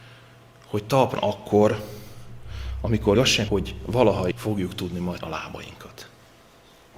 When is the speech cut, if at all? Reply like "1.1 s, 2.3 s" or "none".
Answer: 1.2 s, 3.1 s, 3.5 s, 4.3 s, 5.2 s